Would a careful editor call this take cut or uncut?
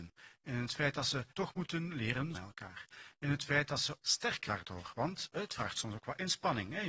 cut